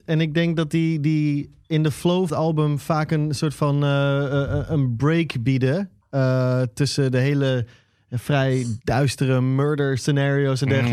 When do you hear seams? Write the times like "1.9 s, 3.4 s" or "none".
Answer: 2.3 s, 8.8 s